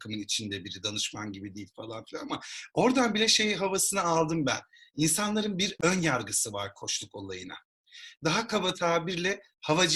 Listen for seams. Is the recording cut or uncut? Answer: uncut